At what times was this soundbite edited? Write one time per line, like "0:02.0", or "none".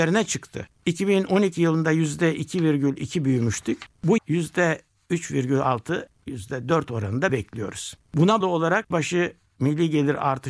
0:04.2
0:07.3
0:08.4
0:08.9